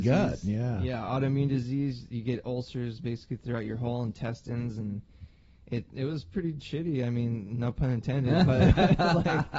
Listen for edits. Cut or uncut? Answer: uncut